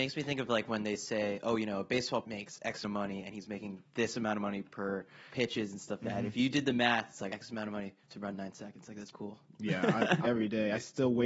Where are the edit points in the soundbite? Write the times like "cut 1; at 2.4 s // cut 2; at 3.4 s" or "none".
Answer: cut 1; at 2.2 s // cut 2; at 2.8 s // cut 3; at 5.3 s // cut 4; at 6.0 s // cut 5; at 7.3 s // cut 6; at 8.0 s // cut 7; at 9.1 s // cut 8; at 10.2 s